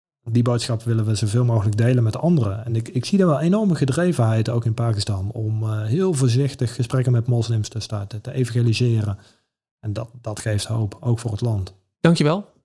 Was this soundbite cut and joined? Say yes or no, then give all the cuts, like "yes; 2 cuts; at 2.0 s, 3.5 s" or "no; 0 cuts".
no; 0 cuts